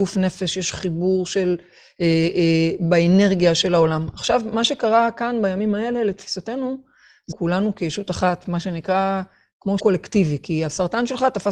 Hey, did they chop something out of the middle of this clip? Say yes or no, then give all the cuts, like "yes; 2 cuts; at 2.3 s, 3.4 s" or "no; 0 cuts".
yes; 2 cuts; at 7.3 s, 9.8 s